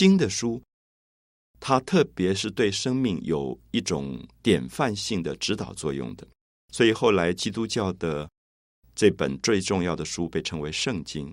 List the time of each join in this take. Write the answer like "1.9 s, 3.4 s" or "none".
none